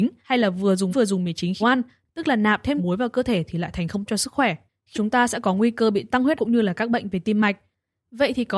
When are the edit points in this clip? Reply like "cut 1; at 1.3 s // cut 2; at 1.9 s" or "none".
cut 1; at 0.9 s // cut 2; at 1.6 s // cut 3; at 2.8 s // cut 4; at 4.1 s // cut 5; at 4.9 s // cut 6; at 6.4 s